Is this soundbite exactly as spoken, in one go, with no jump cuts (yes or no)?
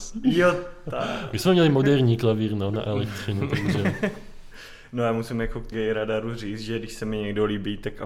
no